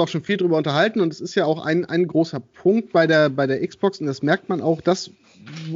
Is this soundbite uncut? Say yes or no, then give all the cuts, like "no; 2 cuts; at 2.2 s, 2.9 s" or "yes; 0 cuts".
yes; 0 cuts